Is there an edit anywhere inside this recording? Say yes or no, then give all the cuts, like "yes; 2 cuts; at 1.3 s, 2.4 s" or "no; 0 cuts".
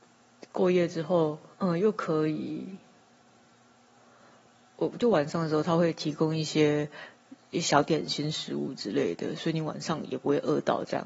yes; 1 cut; at 1.5 s